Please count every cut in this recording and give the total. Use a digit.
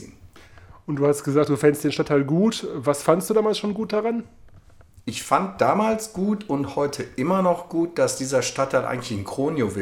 0